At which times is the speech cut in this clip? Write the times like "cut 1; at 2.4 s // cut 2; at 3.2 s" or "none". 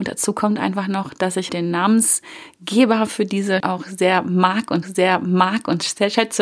cut 1; at 1.5 s // cut 2; at 3.6 s // cut 3; at 4.8 s